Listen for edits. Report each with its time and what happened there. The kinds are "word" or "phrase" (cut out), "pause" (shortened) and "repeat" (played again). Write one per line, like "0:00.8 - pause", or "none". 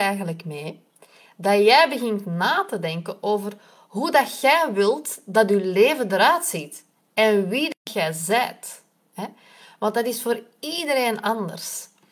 none